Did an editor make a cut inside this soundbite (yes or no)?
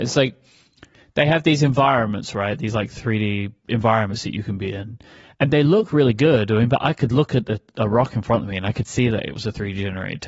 no